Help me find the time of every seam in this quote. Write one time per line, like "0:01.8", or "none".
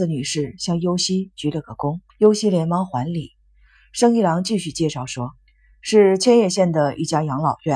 0:02.1
0:05.4